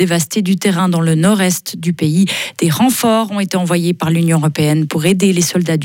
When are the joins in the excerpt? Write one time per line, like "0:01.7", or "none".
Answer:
none